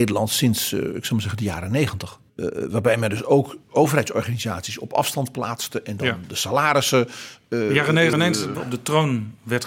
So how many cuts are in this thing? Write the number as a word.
four